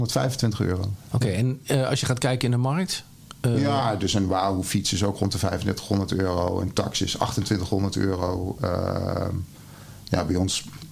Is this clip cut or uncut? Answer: uncut